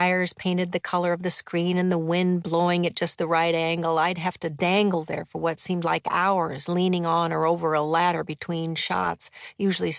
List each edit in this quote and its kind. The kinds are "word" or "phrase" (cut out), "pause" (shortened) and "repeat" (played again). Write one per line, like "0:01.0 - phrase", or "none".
none